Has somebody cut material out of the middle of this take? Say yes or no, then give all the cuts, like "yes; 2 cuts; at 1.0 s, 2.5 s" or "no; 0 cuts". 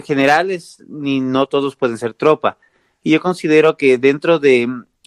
no; 0 cuts